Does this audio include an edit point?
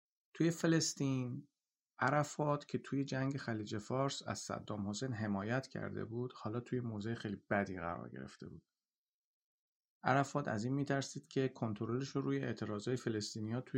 no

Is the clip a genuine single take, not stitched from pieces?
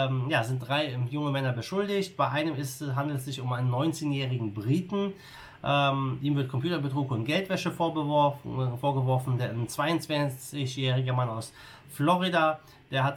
yes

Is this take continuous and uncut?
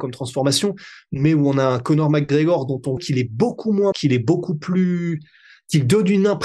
no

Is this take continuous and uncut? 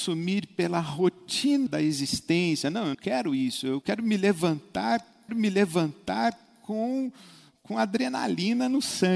no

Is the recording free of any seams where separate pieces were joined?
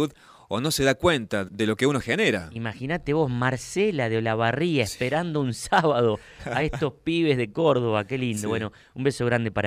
yes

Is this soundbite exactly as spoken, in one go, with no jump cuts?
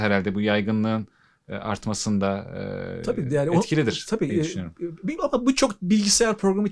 no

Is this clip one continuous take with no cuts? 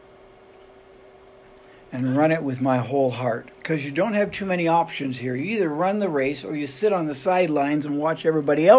no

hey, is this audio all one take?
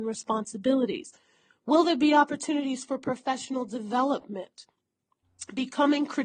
yes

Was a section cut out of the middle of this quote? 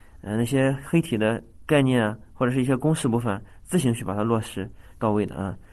no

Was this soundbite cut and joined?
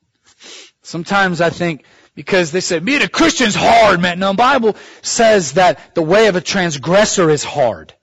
yes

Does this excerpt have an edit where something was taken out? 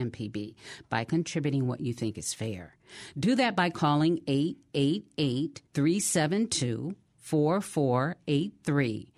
yes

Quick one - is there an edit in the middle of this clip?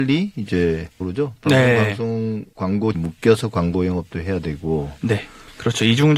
yes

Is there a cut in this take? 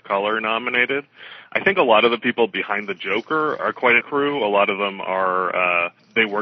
yes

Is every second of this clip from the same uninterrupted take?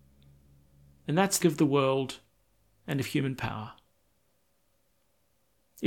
no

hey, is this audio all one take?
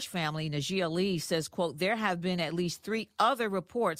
yes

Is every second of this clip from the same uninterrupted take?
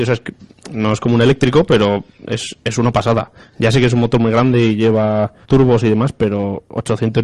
no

